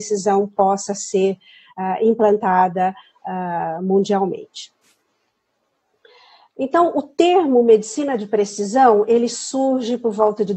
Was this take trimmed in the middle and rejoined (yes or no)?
no